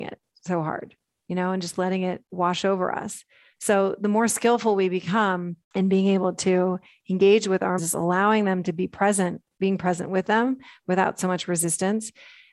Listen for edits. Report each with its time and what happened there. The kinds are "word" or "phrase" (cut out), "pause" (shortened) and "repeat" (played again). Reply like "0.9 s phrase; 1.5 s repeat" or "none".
5.6 s pause; 7.8 s phrase